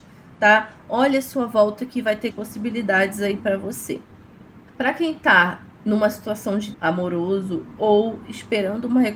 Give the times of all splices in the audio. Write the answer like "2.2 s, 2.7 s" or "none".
2.3 s, 4.7 s, 5.8 s, 6.7 s